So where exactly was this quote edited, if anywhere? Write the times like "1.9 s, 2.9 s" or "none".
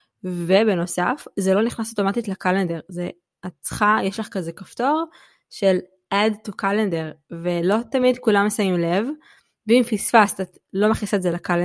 none